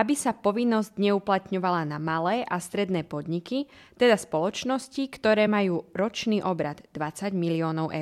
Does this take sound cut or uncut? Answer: uncut